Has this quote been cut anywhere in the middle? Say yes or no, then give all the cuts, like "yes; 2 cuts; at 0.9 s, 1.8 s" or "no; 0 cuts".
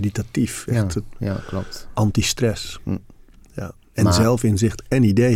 no; 0 cuts